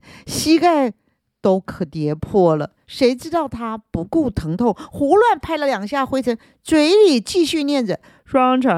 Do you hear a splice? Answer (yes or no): no